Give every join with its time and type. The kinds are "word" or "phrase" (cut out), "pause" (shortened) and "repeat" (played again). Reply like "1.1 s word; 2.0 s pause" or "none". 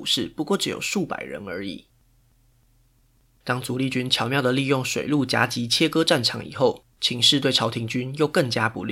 6.9 s pause